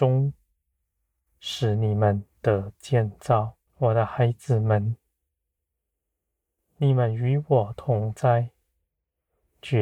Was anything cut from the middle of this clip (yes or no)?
yes